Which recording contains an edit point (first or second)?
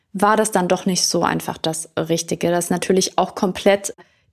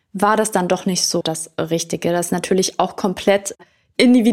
second